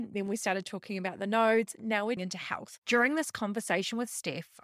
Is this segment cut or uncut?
cut